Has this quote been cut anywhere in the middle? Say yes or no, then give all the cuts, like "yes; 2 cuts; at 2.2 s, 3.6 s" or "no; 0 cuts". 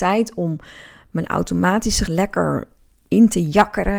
yes; 1 cut; at 2.1 s